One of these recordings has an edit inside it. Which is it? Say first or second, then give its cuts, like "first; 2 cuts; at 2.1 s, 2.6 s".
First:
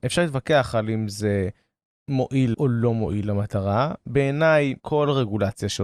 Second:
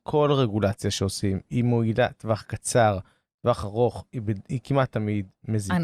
first; 2 cuts; at 2.5 s, 4.8 s